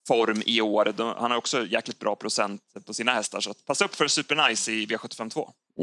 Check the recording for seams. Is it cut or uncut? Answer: uncut